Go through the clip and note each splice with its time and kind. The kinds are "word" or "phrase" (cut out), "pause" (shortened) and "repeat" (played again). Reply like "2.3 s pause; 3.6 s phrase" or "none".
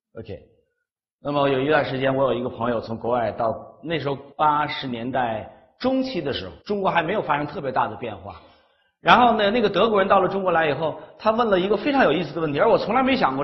4.3 s pause; 6.6 s pause

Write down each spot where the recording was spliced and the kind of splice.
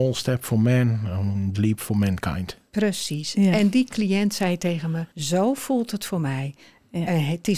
1.5 s word; 5.1 s pause

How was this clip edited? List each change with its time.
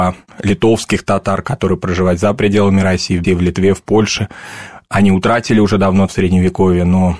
3.2 s word; 6.1 s phrase

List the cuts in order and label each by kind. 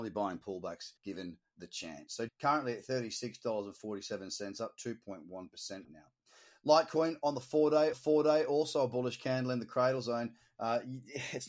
1.0 s pause; 2.3 s word; 5.8 s word; 7.9 s repeat

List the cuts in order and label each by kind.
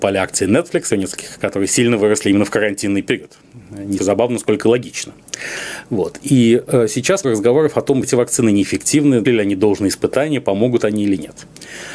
0.9 s word; 1.4 s word; 4.0 s word; 7.2 s word; 8.0 s word; 9.3 s word

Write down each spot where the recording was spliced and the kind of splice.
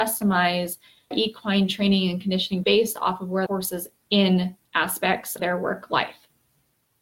1.1 s word; 2.6 s word; 3.5 s word; 4.0 s word; 4.7 s word; 5.4 s word

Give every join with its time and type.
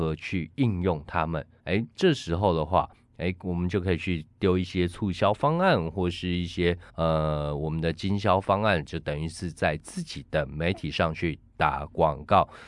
1.6 s pause; 1.9 s pause; 6.9 s pause

